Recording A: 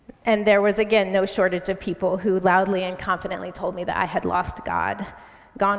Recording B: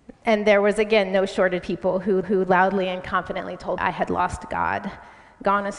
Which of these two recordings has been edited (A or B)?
B